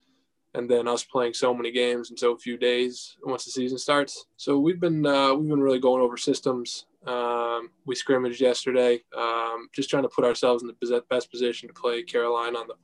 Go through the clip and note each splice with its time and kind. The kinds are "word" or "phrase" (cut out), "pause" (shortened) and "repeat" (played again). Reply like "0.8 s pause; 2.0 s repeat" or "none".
4.3 s pause; 9.1 s pause

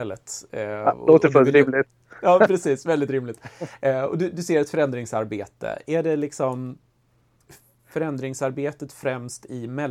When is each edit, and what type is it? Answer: none

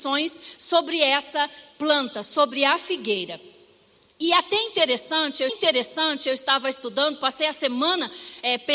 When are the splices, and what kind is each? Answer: 5.5 s repeat

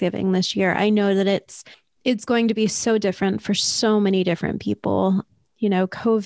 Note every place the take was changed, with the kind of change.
1.7 s pause

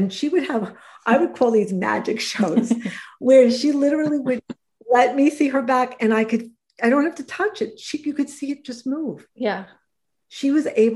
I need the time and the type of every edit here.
9.3 s pause

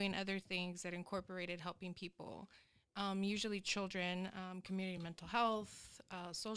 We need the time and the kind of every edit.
none

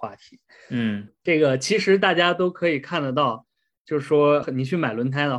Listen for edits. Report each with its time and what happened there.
none

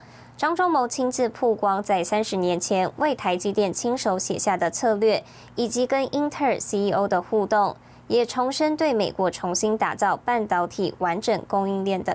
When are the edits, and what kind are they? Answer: none

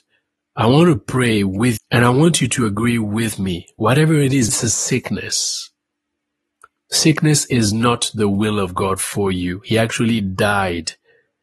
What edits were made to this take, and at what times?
1.8 s word; 4.5 s word

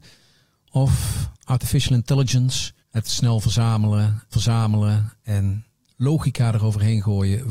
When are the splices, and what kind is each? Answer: 1.3 s pause; 2.8 s pause; 4.3 s repeat

